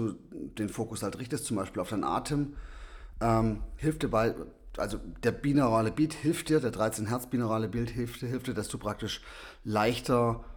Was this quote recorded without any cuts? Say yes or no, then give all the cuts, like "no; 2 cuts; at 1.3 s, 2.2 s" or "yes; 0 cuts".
yes; 0 cuts